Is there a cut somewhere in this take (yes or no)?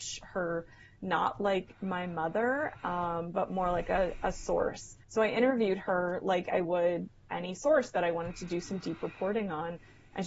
yes